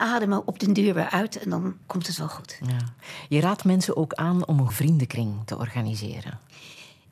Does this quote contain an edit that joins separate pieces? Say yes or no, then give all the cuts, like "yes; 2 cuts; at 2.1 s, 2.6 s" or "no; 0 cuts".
yes; 2 cuts; at 1.8 s, 4.7 s